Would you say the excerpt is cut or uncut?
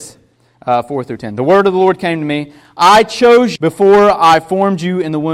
cut